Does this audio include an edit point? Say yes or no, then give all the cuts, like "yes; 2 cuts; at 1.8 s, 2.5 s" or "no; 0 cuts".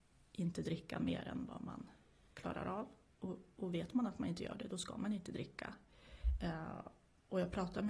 no; 0 cuts